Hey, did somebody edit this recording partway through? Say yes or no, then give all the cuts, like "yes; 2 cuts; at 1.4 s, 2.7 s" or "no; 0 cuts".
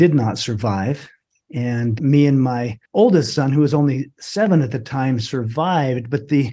yes; 2 cuts; at 2.0 s, 2.9 s